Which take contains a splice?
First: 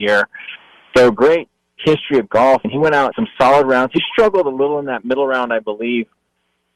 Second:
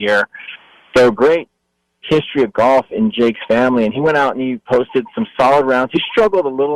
first; 3 cuts; at 1.6 s, 2.6 s, 3.1 s

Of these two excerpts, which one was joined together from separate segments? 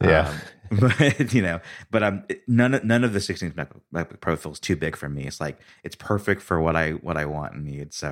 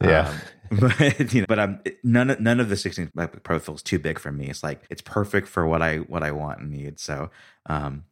second; 3 cuts; at 1.4 s, 3.1 s, 4.9 s

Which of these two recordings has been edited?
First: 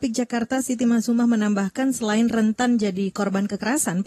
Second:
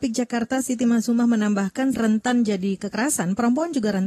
second; 2 cuts; at 1.9 s, 2.8 s

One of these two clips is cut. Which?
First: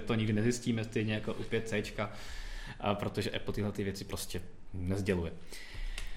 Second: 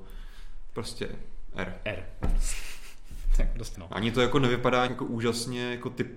second; 2 cuts; at 3.7 s, 4.9 s

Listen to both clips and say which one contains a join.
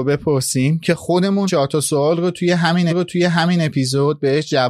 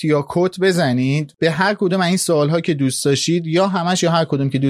first; 2 cuts; at 1.5 s, 2.9 s

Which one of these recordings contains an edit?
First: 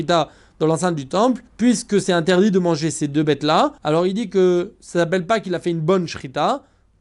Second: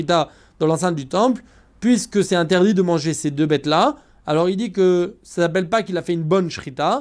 first; 2 cuts; at 1.5 s, 3.8 s

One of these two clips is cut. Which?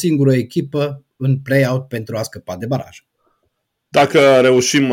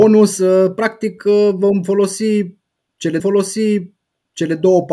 second; 1 cut; at 3.2 s

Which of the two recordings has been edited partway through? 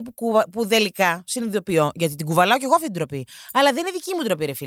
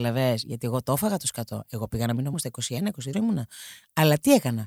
second; 2 cuts; at 2.3 s, 3.1 s

